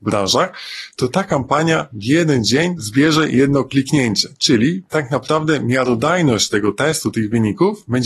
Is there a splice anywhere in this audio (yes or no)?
no